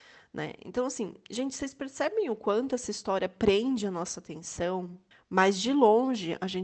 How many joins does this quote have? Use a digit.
1